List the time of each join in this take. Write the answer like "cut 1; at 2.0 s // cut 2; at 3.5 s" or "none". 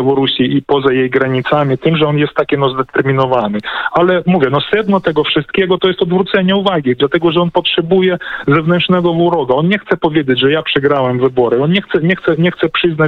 none